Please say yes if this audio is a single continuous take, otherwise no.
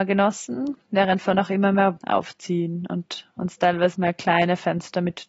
no